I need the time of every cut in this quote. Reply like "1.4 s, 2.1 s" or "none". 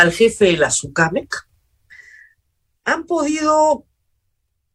none